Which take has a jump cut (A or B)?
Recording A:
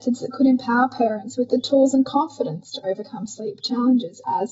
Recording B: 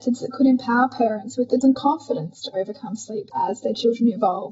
B